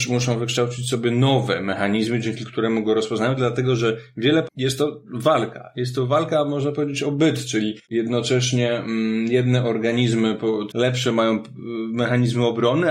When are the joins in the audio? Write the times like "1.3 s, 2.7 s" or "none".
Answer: 4.4 s, 7.8 s, 10.7 s